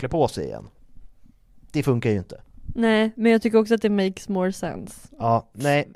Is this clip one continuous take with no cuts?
yes; 0 cuts

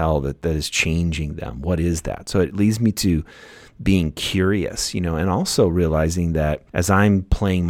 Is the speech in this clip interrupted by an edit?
no; 0 cuts

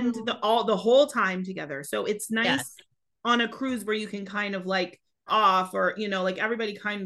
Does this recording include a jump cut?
yes; 1 cut; at 5.3 s

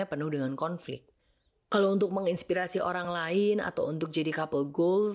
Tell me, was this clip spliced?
no; 0 cuts

